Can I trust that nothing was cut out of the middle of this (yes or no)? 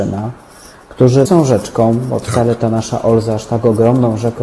no